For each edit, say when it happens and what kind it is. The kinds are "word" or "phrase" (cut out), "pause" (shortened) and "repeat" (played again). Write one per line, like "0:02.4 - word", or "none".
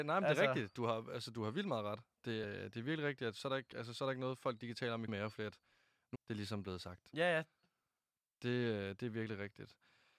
0:02.4 - word
0:05.1 - word
0:06.1 - word